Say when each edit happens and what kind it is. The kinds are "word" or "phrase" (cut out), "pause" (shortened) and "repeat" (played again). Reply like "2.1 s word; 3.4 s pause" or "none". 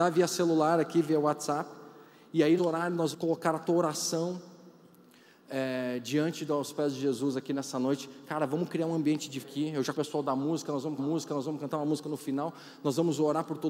2.6 s phrase; 3.1 s word; 9.4 s word; 9.9 s phrase; 11.0 s repeat